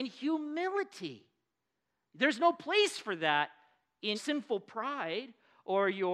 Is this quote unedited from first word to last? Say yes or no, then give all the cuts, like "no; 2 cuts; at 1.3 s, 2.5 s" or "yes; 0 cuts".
no; 1 cut; at 4.1 s